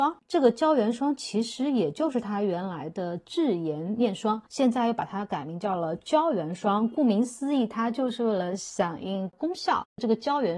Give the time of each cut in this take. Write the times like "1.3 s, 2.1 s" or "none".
4.5 s